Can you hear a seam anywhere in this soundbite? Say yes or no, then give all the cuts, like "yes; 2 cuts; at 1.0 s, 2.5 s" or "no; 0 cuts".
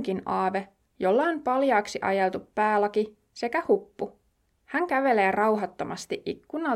no; 0 cuts